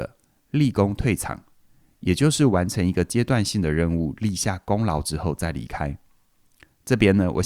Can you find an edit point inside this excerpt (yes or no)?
no